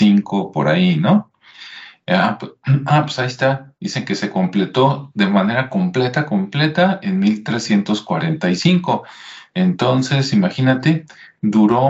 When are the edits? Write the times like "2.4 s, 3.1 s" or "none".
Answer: none